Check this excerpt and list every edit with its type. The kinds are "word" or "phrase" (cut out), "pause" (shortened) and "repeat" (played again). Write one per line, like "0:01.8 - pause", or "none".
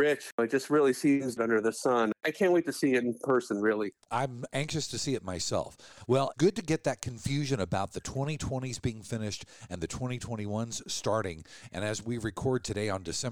0:01.4 - phrase
0:06.3 - word